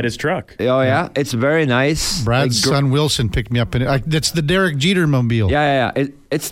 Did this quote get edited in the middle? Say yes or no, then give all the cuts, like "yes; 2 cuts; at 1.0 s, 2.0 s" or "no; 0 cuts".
no; 0 cuts